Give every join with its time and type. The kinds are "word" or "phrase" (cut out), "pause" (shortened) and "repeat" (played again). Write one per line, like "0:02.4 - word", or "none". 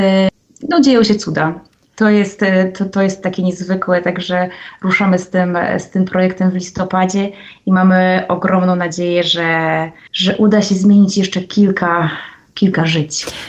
none